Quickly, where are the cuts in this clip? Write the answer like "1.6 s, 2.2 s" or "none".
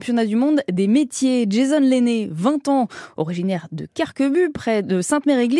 none